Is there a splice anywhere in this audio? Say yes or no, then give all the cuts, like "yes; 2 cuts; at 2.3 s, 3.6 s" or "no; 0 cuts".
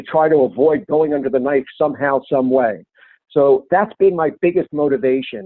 no; 0 cuts